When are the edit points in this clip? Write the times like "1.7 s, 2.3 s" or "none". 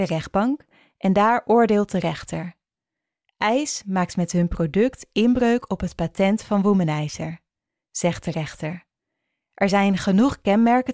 none

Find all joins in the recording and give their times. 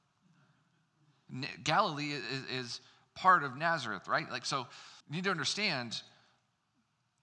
5.0 s

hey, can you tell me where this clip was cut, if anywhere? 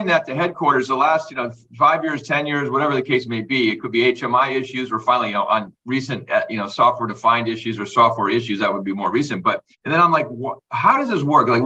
9.7 s

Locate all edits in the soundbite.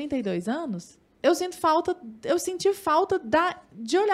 1.1 s

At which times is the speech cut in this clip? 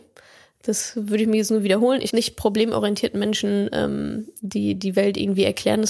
2.1 s

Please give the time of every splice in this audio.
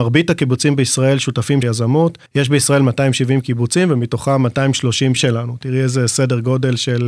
1.6 s, 2.3 s, 5.2 s

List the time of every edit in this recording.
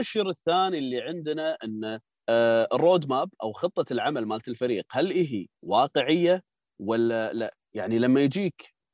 2.2 s, 5.5 s

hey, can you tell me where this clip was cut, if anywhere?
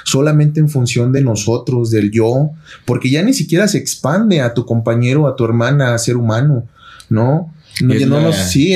none

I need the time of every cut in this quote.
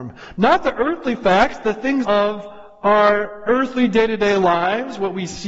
2.0 s

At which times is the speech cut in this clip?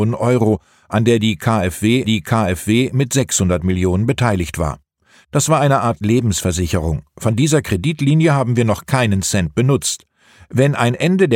2.0 s

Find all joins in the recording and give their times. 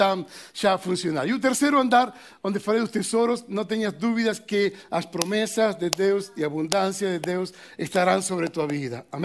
none

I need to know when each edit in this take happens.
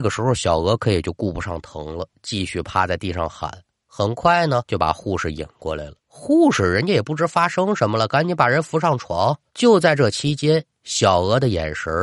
4.7 s, 6.0 s, 9.5 s

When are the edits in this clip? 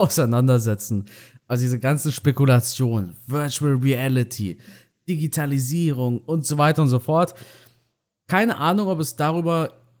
none

